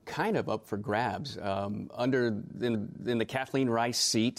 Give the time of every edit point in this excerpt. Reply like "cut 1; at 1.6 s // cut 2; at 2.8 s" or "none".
cut 1; at 2.7 s